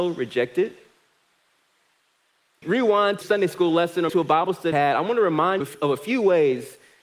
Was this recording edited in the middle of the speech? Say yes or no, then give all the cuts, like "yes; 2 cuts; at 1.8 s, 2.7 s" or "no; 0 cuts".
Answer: yes; 5 cuts; at 2.6 s, 3.2 s, 4.1 s, 4.7 s, 5.6 s